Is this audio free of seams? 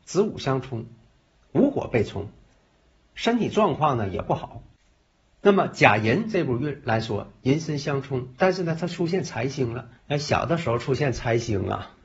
no; 1 cut; at 10.0 s

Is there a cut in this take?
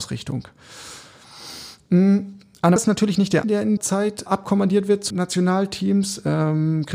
yes; 5 cuts; at 2.8 s, 3.4 s, 3.8 s, 4.3 s, 5.1 s

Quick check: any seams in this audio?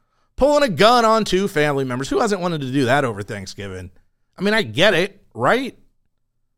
no; 0 cuts

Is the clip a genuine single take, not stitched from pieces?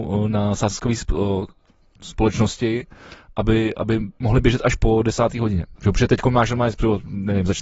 no; 1 cut; at 5.8 s

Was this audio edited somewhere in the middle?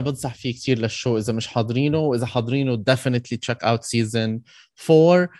no; 0 cuts

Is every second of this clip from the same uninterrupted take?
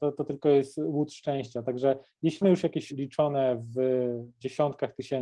no; 2 cuts; at 2.4 s, 2.9 s

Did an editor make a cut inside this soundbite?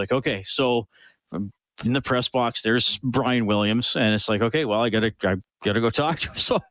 no; 0 cuts

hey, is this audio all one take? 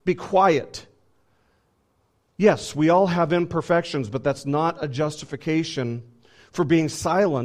yes; 0 cuts

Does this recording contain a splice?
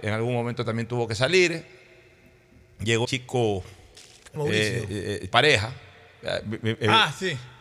yes; 3 cuts; at 3.0 s, 4.4 s, 5.3 s

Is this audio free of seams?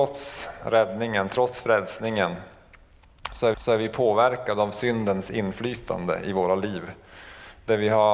no; 1 cut; at 3.5 s

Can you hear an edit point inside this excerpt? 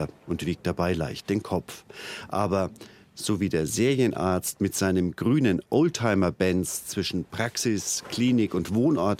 no; 0 cuts

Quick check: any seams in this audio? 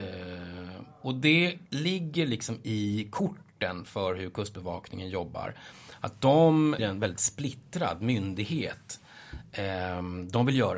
yes; 2 cuts; at 1.7 s, 6.8 s

